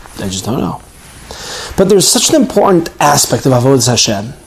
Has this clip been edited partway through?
no; 0 cuts

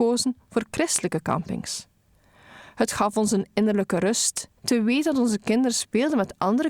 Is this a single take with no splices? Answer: no; 1 cut; at 4.6 s

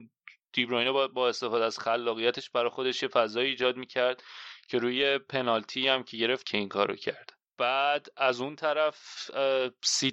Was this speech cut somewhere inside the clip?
yes; 2 cuts; at 6.4 s, 7.5 s

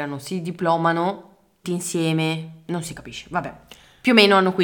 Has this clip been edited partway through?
yes; 1 cut; at 1.6 s

